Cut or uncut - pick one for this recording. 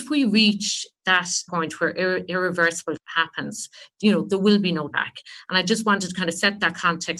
cut